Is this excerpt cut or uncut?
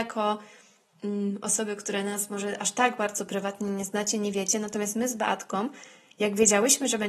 uncut